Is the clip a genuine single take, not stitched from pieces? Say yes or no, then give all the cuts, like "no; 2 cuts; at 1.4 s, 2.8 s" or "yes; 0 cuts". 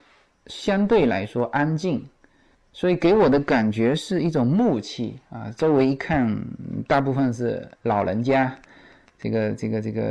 no; 1 cut; at 7.8 s